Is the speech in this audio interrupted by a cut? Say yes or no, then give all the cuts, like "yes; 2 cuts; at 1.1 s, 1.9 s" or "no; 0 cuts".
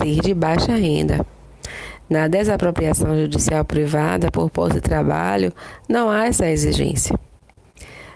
no; 0 cuts